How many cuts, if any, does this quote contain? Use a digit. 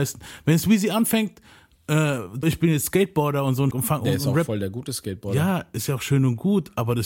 2